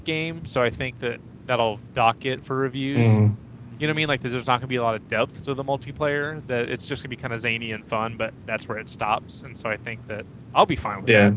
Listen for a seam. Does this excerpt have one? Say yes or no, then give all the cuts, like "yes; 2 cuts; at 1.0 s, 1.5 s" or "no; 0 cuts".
no; 0 cuts